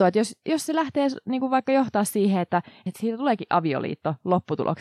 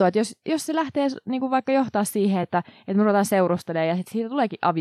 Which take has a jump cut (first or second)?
first